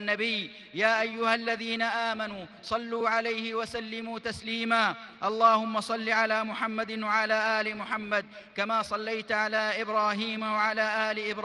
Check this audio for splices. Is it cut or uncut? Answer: uncut